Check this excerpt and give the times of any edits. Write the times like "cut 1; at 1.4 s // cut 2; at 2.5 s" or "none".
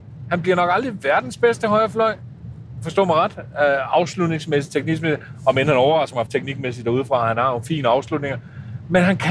cut 1; at 6.3 s

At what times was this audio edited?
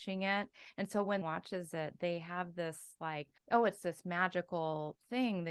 cut 1; at 1.2 s // cut 2; at 3.4 s

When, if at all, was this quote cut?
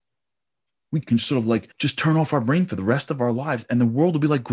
cut 1; at 1.0 s // cut 2; at 1.7 s

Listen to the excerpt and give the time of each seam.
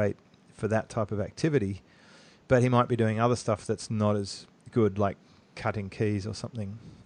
none

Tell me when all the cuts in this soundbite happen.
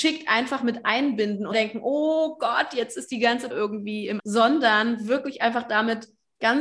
cut 1; at 1.5 s // cut 2; at 3.5 s // cut 3; at 4.2 s

